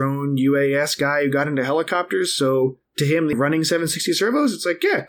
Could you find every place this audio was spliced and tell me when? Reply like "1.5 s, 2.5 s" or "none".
2.9 s, 3.3 s

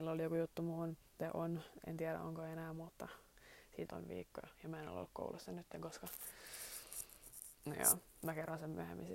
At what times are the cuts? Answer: 3.9 s

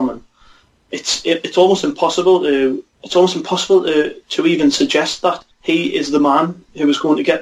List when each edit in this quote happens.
2.9 s, 5.5 s

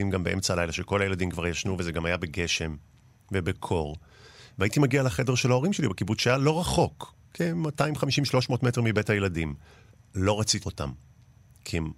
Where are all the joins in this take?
9.9 s, 10.6 s

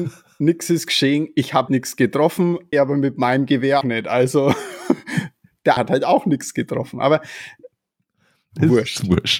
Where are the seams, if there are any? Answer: 1.7 s, 2.7 s, 3.8 s, 5.8 s

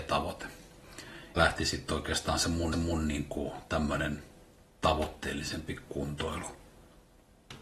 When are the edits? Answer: 1.4 s, 2.7 s

